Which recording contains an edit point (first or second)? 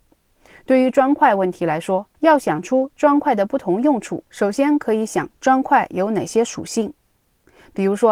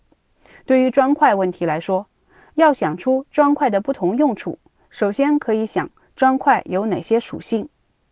first